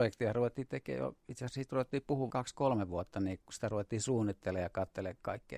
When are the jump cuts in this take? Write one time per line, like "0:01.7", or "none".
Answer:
0:01.2
0:02.3
0:03.4